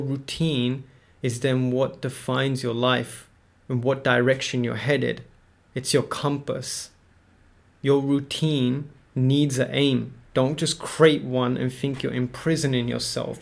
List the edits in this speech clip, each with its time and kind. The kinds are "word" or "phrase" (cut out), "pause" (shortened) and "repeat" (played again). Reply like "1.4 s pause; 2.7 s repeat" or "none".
none